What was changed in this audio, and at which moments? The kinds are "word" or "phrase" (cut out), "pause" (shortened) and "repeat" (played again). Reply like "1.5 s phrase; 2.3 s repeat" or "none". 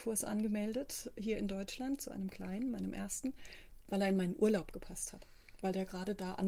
none